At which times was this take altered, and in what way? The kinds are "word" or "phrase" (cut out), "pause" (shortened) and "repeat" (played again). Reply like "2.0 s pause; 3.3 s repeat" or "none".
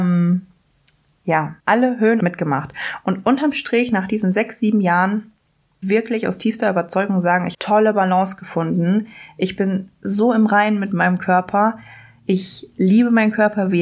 1.6 s pause; 2.2 s phrase; 5.8 s phrase; 7.5 s phrase